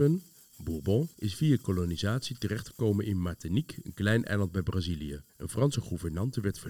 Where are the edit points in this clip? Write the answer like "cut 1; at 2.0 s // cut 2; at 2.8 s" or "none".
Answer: cut 1; at 1.1 s // cut 2; at 5.3 s

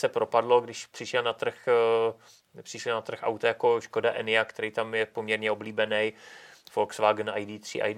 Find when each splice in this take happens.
none

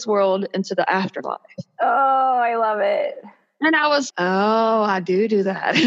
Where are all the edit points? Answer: cut 1; at 4.1 s

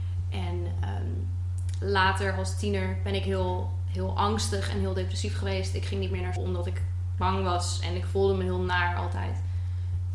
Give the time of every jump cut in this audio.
cut 1; at 6.4 s

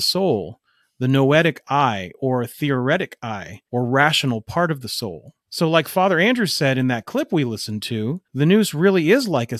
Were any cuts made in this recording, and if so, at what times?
cut 1; at 3.6 s // cut 2; at 5.4 s // cut 3; at 8.2 s

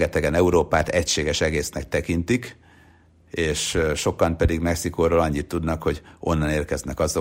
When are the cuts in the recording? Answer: none

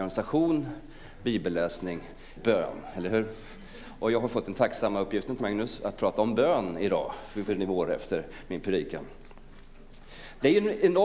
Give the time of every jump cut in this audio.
cut 1; at 2.4 s // cut 2; at 5.4 s // cut 3; at 7.5 s

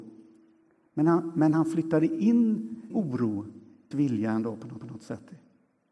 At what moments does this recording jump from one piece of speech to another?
cut 1; at 2.9 s // cut 2; at 3.9 s // cut 3; at 4.8 s

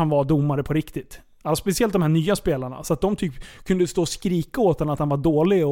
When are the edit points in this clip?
none

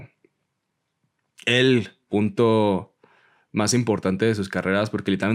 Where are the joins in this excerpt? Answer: none

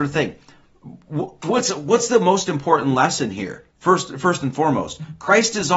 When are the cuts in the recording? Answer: cut 1; at 3.7 s

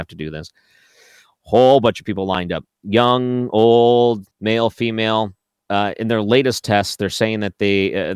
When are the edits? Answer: cut 1; at 4.3 s // cut 2; at 5.6 s

